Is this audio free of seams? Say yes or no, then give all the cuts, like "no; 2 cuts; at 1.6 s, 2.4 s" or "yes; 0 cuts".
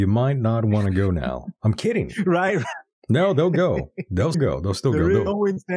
no; 1 cut; at 4.3 s